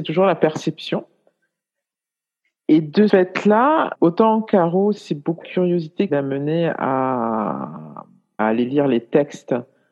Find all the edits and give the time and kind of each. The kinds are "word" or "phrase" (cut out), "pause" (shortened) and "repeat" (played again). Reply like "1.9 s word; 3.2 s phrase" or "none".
3.1 s word; 3.9 s word; 5.4 s word; 6.1 s word; 8.4 s word